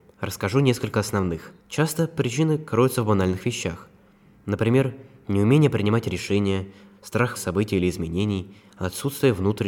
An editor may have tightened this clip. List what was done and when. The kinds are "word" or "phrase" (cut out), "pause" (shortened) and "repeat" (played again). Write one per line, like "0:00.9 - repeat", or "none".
0:01.6 - pause
0:07.4 - word